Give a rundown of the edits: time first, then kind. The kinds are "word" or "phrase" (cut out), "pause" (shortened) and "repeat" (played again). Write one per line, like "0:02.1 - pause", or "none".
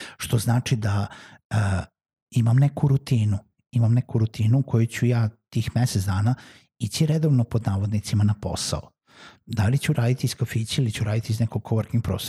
none